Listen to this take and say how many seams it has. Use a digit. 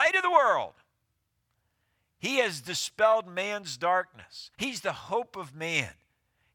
1